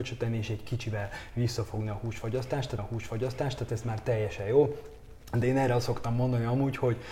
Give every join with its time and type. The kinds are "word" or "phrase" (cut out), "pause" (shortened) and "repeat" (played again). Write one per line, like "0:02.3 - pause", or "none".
0:02.8 - repeat